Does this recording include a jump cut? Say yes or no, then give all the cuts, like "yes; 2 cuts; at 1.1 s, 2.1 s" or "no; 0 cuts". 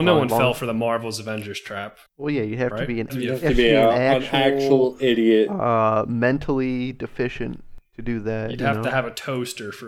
yes; 2 cuts; at 2.1 s, 3.1 s